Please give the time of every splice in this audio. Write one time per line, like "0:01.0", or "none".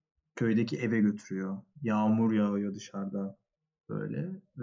none